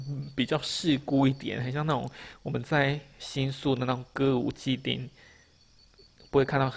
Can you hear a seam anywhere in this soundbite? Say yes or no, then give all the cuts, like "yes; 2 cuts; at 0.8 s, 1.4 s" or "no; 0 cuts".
no; 0 cuts